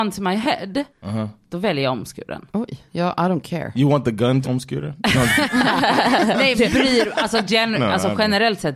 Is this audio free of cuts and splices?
no; 4 cuts; at 0.9 s, 2.5 s, 4.4 s, 6.6 s

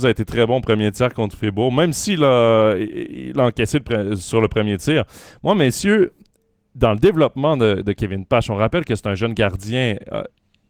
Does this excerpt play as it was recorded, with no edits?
yes; 0 cuts

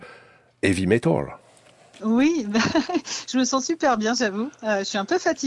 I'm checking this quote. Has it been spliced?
no; 0 cuts

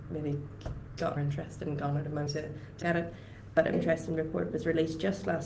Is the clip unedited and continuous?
no; 4 cuts; at 1.2 s, 2.3 s, 2.8 s, 3.7 s

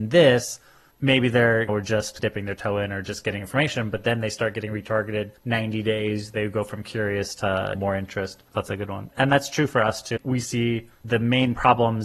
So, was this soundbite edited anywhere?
yes; 3 cuts; at 5.4 s, 8.5 s, 10.9 s

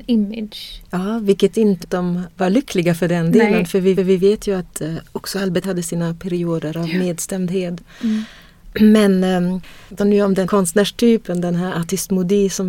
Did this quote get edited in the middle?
yes; 6 cuts; at 1.8 s, 2.3 s, 4.0 s, 5.6 s, 10.0 s, 10.4 s

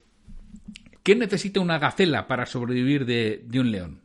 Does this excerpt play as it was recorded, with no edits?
no; 1 cut; at 0.9 s

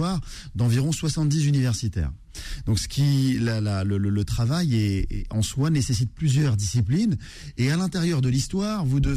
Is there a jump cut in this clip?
no; 0 cuts

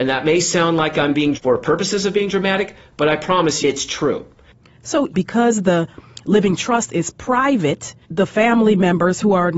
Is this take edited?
yes; 4 cuts; at 1.3 s, 3.6 s, 5.1 s, 8.0 s

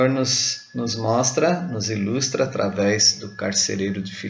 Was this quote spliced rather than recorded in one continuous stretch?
no; 0 cuts

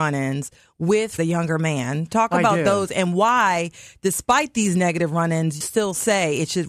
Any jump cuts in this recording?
yes; 2 cuts; at 1.2 s, 5.6 s

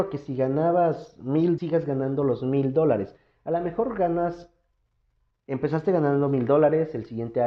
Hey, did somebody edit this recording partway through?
yes; 1 cut; at 1.6 s

